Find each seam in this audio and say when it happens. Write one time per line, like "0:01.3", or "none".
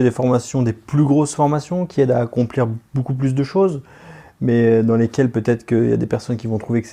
none